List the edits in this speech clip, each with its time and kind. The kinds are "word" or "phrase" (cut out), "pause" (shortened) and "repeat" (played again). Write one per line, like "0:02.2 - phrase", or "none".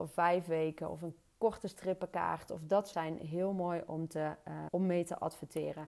0:02.9 - word
0:04.7 - word